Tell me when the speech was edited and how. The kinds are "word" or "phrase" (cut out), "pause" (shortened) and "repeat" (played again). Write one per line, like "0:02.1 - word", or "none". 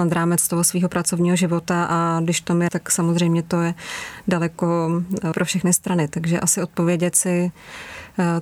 0:02.7 - word
0:05.3 - word